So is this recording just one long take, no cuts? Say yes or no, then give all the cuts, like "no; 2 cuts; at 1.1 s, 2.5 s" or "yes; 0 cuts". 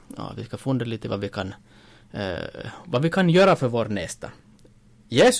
yes; 0 cuts